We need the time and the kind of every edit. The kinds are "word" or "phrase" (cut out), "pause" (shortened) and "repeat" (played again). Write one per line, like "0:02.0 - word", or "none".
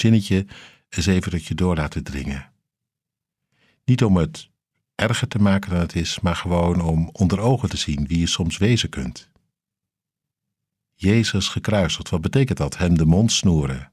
none